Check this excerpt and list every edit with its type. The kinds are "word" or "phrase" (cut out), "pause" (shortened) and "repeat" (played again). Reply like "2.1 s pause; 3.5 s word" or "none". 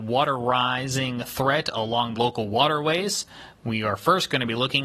2.1 s phrase

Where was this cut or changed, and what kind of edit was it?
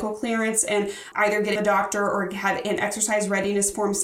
1.1 s word; 1.6 s phrase

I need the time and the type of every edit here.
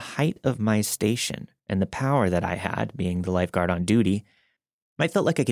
1.6 s pause

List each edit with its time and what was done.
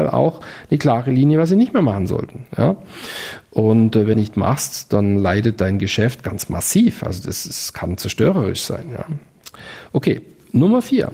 4.1 s phrase

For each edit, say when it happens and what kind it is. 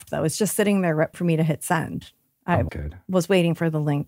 1.1 s word; 2.7 s word

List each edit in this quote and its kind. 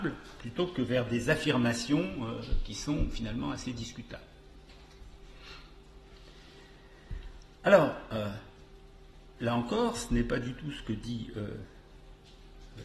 none

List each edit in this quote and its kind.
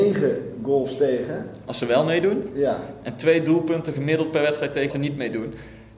4.9 s word

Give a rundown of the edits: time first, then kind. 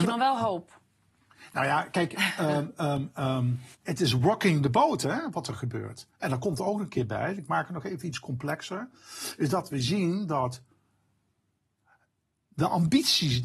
3.7 s pause

